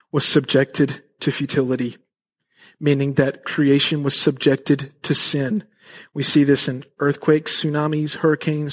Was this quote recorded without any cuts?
yes; 0 cuts

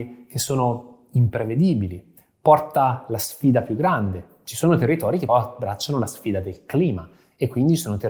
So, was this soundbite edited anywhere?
yes; 1 cut; at 5.3 s

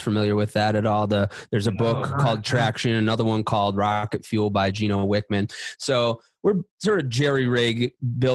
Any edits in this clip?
no; 0 cuts

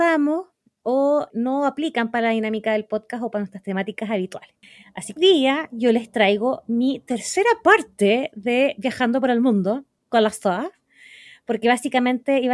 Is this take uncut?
no; 2 cuts; at 1.3 s, 5.2 s

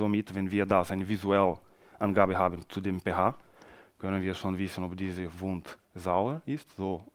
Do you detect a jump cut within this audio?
yes; 1 cut; at 5.8 s

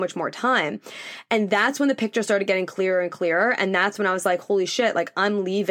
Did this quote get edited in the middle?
no; 0 cuts

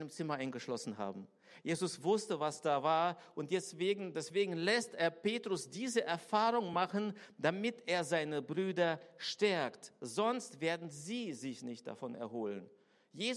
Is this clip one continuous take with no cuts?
yes; 0 cuts

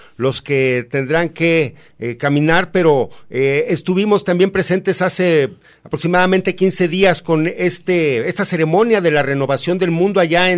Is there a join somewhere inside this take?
no; 0 cuts

